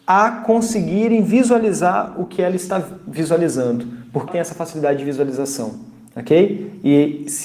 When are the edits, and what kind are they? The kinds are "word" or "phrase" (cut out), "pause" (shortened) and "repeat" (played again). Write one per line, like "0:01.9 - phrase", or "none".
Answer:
0:04.3 - word